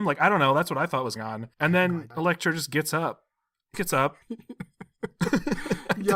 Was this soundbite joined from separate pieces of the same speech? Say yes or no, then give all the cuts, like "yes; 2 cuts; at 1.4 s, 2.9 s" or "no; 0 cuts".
yes; 5 cuts; at 1.2 s, 1.5 s, 2.1 s, 3.7 s, 4.2 s